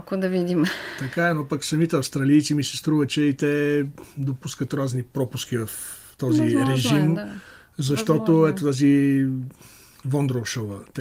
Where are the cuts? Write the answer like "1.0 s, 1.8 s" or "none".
none